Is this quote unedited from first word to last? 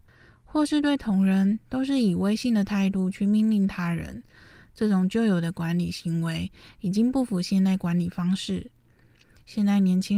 yes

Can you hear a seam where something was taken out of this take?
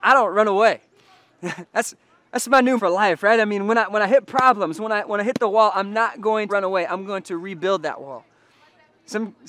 yes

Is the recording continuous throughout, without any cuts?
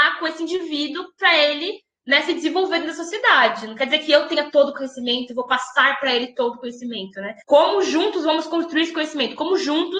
no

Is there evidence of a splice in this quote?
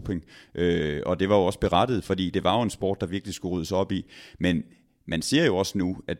no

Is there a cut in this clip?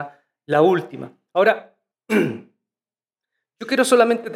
yes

